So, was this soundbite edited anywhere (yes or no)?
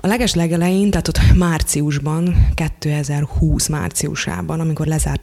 no